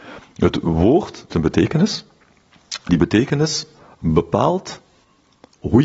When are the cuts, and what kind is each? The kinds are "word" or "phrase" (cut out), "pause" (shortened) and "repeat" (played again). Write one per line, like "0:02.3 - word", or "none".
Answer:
0:01.3 - word
0:02.9 - word